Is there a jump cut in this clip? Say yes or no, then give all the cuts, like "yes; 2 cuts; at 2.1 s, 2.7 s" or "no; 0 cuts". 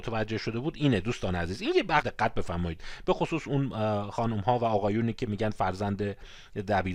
yes; 1 cut; at 2.0 s